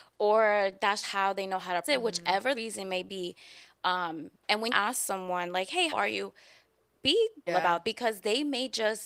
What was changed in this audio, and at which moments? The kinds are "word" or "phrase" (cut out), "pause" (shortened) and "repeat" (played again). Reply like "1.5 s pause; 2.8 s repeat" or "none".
1.0 s word; 1.8 s word; 2.5 s word; 4.7 s word; 5.9 s word; 7.5 s word; 7.8 s word